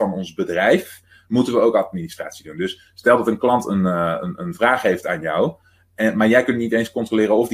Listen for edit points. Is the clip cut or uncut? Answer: uncut